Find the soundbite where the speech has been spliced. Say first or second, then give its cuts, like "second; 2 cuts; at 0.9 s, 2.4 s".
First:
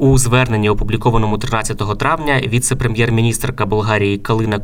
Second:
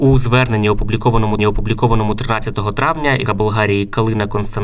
second; 2 cuts; at 1.4 s, 3.3 s